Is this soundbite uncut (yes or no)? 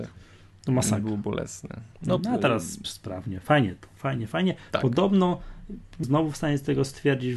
no